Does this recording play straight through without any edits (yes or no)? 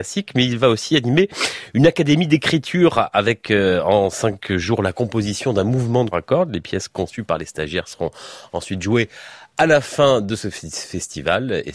no